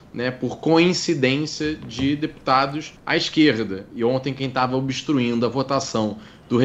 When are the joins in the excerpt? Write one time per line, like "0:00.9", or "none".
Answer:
0:03.0